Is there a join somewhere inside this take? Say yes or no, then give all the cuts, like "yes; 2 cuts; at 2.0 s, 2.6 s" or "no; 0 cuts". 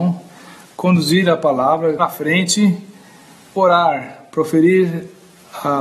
yes; 2 cuts; at 2.0 s, 3.5 s